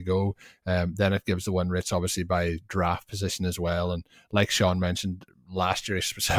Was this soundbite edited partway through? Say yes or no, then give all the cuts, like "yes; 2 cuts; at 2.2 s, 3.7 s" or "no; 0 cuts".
no; 0 cuts